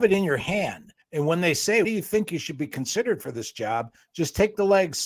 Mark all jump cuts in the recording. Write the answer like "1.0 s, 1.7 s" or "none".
1.0 s, 1.8 s